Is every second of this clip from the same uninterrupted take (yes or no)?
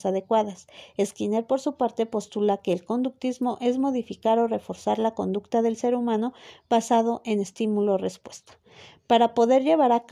yes